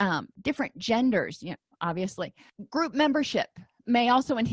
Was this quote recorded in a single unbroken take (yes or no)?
yes